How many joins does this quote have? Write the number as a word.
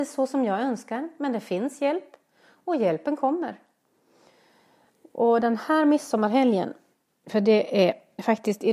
zero